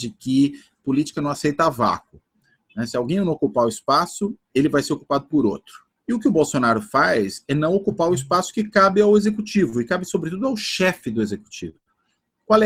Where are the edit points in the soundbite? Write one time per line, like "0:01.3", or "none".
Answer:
0:04.4
0:05.9